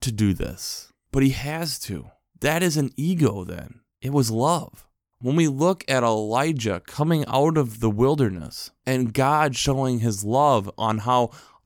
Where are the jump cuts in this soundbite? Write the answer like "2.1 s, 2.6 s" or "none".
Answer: none